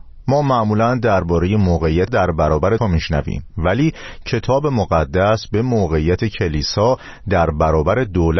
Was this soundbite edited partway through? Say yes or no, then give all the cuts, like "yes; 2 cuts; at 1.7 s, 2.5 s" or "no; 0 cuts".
yes; 2 cuts; at 2.1 s, 2.8 s